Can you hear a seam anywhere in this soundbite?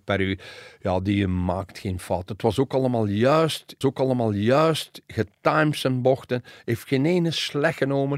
yes; 1 cut; at 3.8 s

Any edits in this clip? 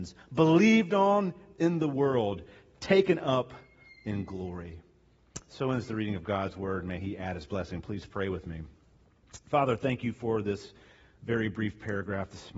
no; 0 cuts

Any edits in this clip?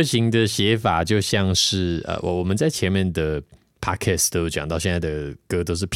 no; 0 cuts

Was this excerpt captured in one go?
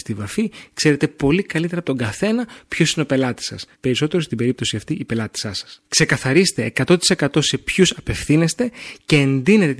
no; 2 cuts; at 3.7 s, 5.8 s

